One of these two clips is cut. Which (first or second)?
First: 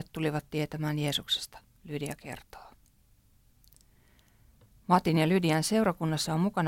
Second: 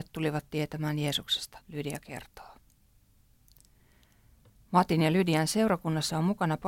second